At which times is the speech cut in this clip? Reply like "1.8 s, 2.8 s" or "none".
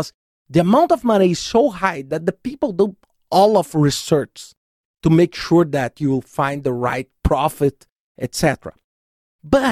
none